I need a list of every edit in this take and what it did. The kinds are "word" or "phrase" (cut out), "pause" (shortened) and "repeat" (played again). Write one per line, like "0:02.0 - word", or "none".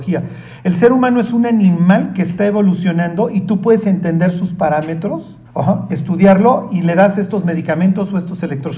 0:05.4 - pause